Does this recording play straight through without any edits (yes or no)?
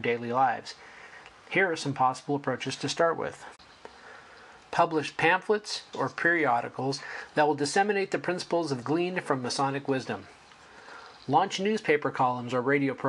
no